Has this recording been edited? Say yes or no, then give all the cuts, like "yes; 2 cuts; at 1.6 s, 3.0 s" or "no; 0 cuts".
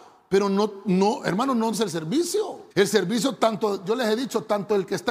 yes; 2 cuts; at 1.7 s, 2.7 s